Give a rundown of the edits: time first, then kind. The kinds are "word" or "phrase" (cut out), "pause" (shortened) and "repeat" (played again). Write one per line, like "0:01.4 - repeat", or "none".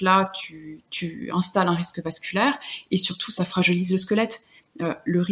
none

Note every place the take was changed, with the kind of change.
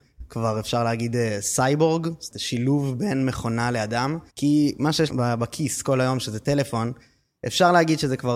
0:02.3 - word
0:04.3 - pause
0:05.1 - phrase

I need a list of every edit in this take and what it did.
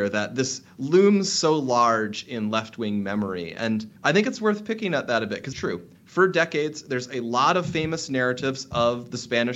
0:04.0 - pause
0:05.5 - word
0:06.0 - pause

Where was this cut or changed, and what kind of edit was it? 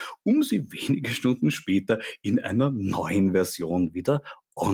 none

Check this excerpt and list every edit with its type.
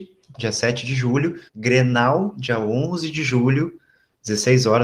0:01.5 - pause

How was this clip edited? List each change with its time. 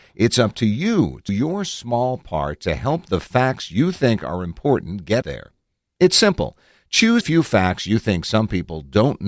0:01.3 - word
0:05.2 - word
0:07.2 - word

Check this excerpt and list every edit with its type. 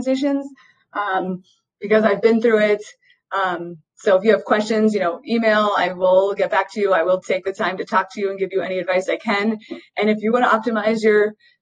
none

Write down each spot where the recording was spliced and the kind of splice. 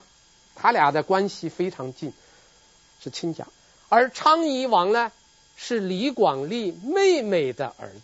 none

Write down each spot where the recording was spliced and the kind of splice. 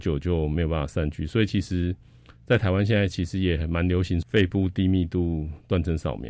none

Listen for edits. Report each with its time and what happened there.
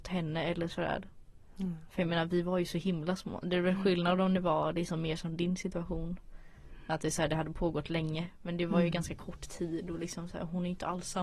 none

